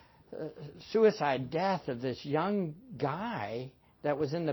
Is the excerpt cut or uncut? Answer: uncut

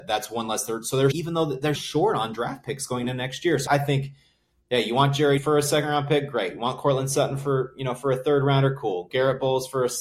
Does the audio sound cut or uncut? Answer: cut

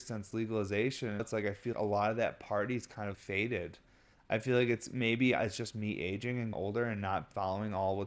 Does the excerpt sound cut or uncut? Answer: cut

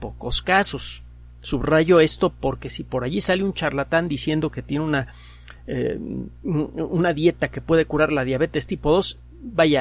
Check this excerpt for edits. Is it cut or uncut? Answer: uncut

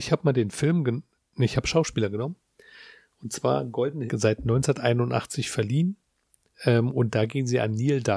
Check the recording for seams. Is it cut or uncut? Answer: cut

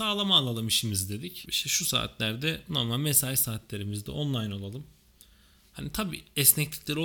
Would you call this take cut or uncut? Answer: uncut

